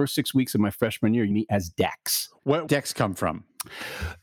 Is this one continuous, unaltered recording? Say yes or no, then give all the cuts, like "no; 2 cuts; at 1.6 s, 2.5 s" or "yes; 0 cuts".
no; 2 cuts; at 1.3 s, 2.7 s